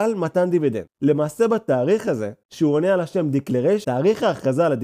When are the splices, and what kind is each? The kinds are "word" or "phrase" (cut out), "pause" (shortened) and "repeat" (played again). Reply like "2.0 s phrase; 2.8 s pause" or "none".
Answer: 2.4 s pause; 3.8 s word